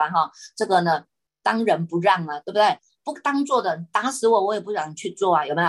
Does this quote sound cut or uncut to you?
uncut